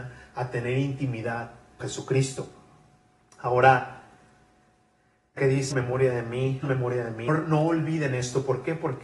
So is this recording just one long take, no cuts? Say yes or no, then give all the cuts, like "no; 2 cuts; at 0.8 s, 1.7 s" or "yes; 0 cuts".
no; 5 cuts; at 1.8 s, 5.4 s, 5.7 s, 6.6 s, 7.3 s